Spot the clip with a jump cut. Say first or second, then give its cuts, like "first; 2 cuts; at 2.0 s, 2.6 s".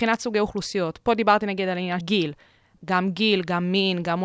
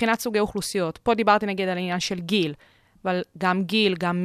first; 2 cuts; at 2.0 s, 2.8 s